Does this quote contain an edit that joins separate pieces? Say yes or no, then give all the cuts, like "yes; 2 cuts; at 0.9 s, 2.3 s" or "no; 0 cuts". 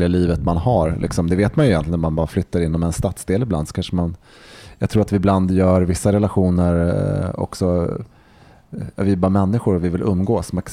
no; 0 cuts